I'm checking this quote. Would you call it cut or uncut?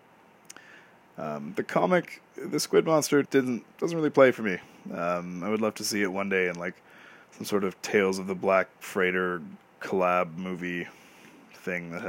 cut